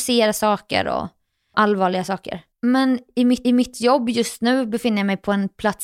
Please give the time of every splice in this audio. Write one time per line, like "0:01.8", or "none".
0:01.5
0:02.5
0:03.4